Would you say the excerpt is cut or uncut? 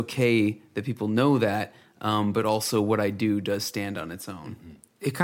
uncut